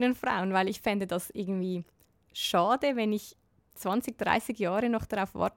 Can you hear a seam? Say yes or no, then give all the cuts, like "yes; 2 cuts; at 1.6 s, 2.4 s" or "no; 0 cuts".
no; 0 cuts